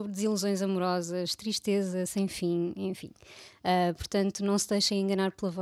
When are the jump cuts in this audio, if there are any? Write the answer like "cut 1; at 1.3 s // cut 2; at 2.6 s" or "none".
none